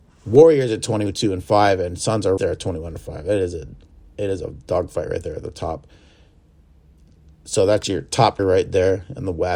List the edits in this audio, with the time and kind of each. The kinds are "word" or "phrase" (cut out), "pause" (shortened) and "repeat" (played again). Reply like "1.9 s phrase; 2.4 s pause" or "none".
2.4 s word; 8.4 s word